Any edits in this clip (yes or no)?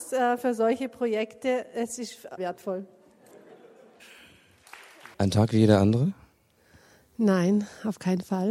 yes